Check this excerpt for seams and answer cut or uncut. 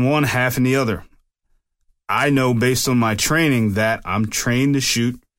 uncut